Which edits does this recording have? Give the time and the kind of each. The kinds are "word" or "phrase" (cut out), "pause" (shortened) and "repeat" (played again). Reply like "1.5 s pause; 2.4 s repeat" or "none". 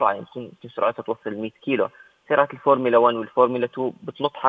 none